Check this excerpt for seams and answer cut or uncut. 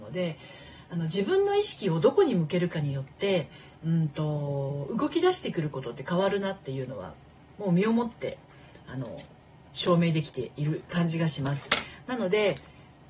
uncut